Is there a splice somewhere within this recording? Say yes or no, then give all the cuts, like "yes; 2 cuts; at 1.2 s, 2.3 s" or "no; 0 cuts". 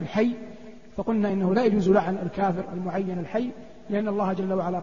no; 0 cuts